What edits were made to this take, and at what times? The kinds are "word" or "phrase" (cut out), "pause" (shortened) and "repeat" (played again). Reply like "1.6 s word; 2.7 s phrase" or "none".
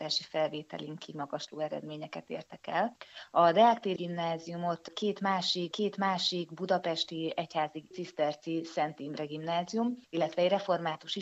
4.0 s word; 5.7 s repeat; 7.9 s phrase